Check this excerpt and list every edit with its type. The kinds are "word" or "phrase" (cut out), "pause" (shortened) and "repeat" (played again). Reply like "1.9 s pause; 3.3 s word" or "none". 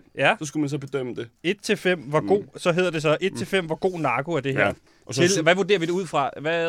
1.4 s pause; 4.9 s pause